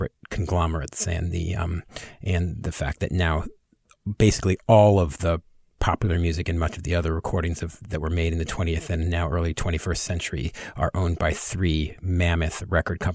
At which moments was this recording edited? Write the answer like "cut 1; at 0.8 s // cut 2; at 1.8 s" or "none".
none

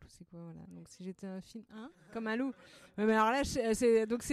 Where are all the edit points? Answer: none

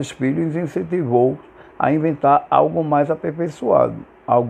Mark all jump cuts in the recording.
none

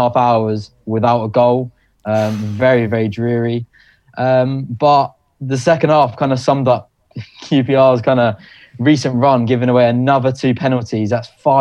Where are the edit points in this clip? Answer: none

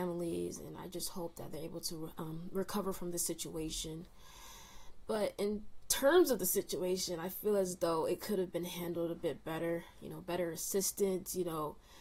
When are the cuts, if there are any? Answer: none

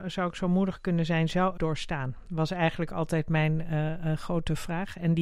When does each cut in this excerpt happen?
cut 1; at 1.6 s

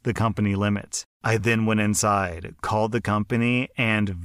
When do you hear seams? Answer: none

